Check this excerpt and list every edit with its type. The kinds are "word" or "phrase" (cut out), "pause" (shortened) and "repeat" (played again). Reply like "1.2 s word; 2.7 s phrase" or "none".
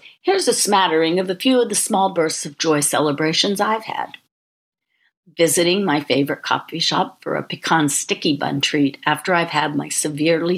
none